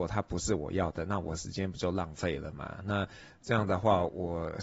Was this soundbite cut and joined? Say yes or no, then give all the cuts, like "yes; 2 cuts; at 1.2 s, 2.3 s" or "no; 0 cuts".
no; 0 cuts